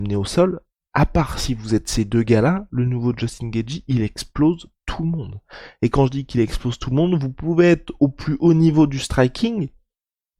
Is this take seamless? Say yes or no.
yes